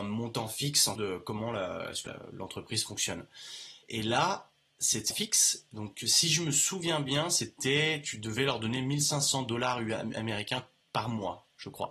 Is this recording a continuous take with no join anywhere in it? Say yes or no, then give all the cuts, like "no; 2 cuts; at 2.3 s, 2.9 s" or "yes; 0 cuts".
no; 4 cuts; at 1.0 s, 2.1 s, 3.8 s, 5.1 s